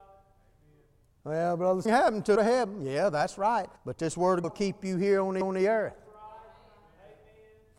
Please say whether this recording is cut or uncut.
cut